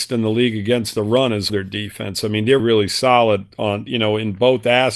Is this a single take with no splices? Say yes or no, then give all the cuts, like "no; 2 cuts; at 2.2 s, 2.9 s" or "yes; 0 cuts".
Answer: no; 2 cuts; at 1.5 s, 2.6 s